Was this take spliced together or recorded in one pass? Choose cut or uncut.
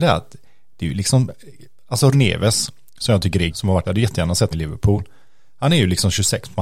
cut